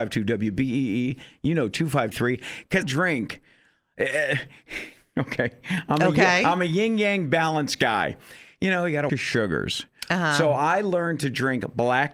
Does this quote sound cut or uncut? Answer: cut